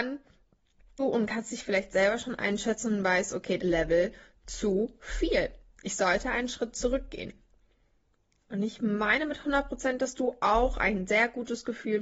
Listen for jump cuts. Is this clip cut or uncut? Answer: cut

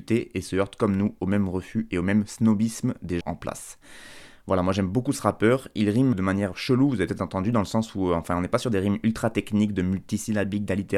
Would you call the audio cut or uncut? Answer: cut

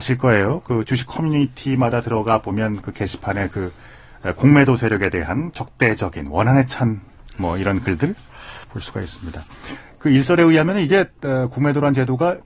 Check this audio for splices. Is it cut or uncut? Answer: cut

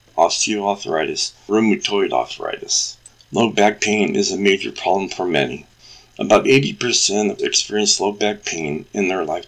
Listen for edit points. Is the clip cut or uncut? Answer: cut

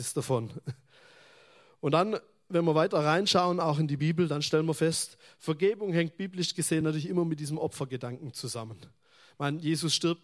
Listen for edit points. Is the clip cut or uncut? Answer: uncut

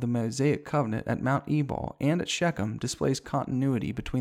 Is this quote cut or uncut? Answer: uncut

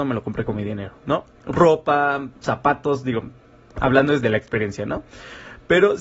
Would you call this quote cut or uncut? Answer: uncut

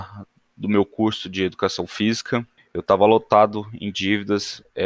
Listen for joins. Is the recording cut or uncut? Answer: cut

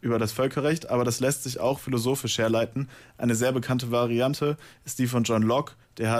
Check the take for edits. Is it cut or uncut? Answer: uncut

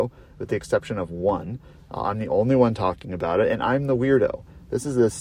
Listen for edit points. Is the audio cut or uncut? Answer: uncut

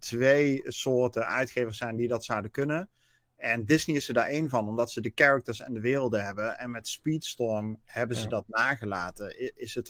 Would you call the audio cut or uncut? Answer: uncut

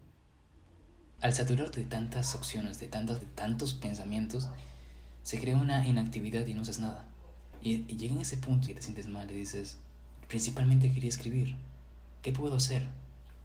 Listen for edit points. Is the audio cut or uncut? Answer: cut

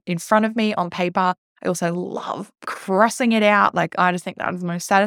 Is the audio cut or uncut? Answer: uncut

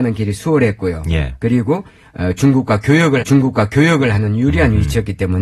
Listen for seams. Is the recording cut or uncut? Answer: cut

